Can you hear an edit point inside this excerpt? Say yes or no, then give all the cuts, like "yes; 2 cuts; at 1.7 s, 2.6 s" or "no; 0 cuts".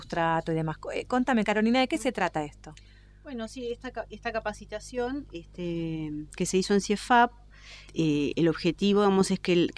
yes; 2 cuts; at 7.9 s, 8.3 s